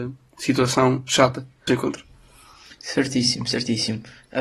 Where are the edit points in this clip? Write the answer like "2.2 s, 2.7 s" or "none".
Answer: 1.7 s